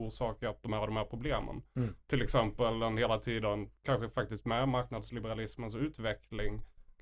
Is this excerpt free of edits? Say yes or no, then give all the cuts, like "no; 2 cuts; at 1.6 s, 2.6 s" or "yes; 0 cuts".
yes; 0 cuts